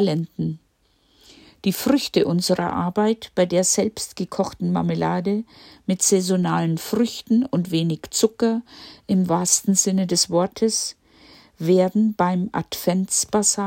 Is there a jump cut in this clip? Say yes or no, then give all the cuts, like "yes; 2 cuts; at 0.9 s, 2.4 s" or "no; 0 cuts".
no; 0 cuts